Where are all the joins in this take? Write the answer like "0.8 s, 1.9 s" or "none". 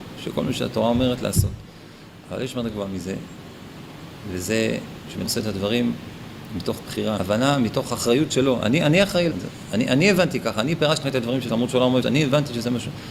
2.7 s, 5.2 s, 7.2 s, 9.3 s, 11.0 s, 11.5 s, 12.0 s